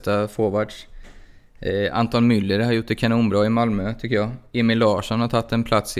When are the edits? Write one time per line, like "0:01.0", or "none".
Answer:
none

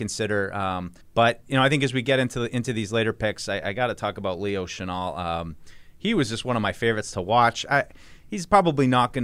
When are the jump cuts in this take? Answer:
0:01.0

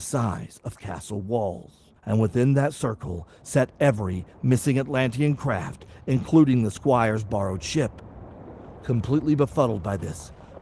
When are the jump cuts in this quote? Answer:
0:02.0

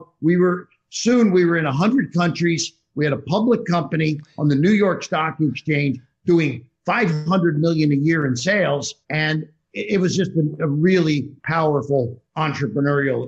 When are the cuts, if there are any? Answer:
0:09.0

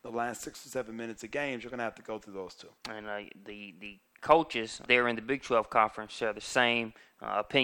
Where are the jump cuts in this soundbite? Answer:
0:02.8
0:04.9

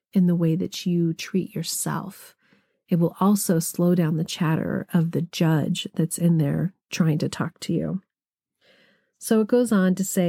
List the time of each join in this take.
none

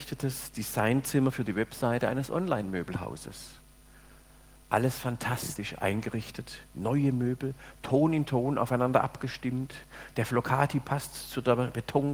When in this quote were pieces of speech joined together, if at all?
none

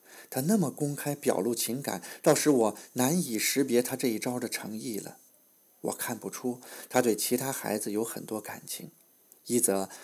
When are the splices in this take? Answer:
none

